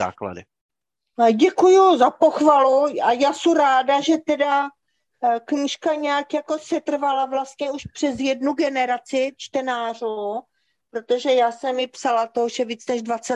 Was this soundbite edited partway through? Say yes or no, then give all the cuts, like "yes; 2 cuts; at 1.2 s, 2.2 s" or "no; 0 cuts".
no; 0 cuts